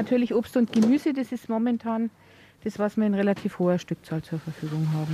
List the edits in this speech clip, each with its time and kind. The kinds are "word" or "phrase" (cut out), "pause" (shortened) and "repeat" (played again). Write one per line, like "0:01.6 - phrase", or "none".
none

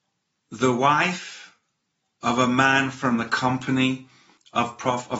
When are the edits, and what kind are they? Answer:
none

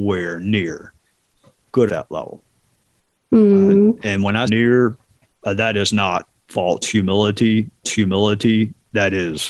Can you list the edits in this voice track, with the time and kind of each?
0:01.9 - phrase
0:04.5 - phrase
0:07.8 - repeat

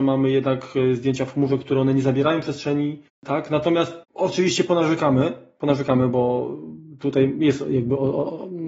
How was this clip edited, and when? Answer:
0:03.1 - pause
0:04.0 - pause

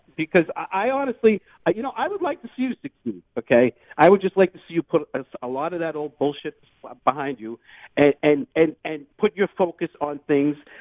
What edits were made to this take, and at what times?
0:03.3 - pause
0:08.5 - pause
0:09.1 - pause

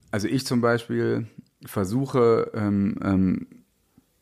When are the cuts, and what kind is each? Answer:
none

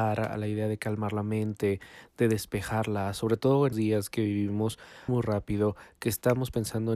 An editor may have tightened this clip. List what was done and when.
0:03.7 - word
0:05.1 - word

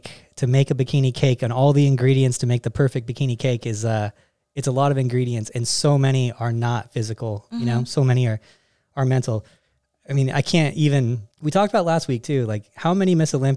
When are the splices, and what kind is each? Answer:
0:11.3 - pause

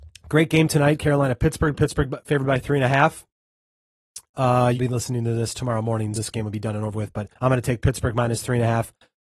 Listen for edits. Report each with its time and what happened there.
0:04.7 - phrase
0:06.1 - word
0:07.3 - pause

